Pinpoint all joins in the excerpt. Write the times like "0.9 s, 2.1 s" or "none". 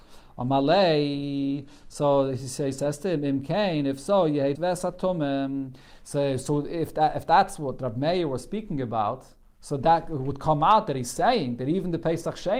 4.5 s